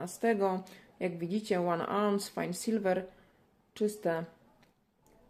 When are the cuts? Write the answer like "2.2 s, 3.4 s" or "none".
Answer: none